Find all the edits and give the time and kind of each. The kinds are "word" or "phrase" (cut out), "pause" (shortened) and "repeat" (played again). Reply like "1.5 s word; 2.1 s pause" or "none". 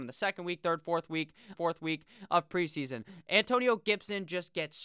1.5 s repeat

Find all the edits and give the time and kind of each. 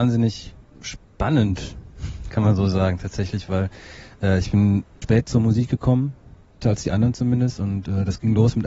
5.0 s word; 6.6 s word

